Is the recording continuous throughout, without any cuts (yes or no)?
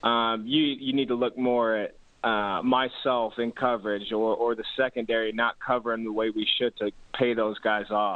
yes